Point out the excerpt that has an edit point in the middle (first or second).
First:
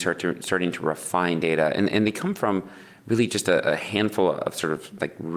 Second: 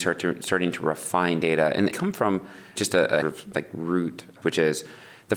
second